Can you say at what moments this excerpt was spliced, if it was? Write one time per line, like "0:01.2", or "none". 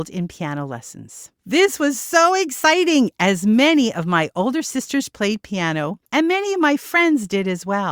0:01.4
0:06.1